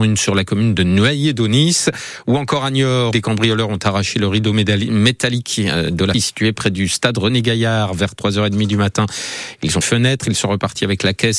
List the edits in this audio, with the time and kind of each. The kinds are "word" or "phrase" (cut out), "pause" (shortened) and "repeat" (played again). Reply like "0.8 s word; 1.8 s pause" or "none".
3.1 s word; 6.1 s word; 9.8 s phrase